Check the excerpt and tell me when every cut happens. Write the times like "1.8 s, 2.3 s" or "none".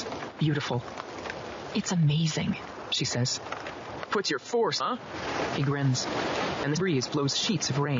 4.8 s, 6.8 s